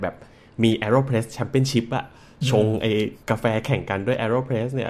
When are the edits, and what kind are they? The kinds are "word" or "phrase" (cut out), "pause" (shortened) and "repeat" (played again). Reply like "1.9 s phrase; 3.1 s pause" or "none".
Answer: 3.2 s pause